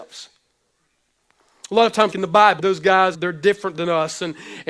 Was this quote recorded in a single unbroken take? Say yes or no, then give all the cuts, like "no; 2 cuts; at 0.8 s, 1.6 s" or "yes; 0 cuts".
no; 3 cuts; at 2.1 s, 2.6 s, 3.1 s